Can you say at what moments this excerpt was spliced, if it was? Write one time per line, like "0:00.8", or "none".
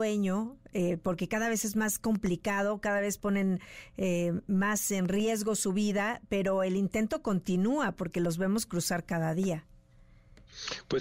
none